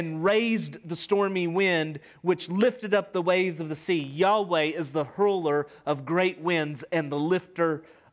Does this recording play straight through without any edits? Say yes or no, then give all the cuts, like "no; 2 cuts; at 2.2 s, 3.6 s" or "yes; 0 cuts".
yes; 0 cuts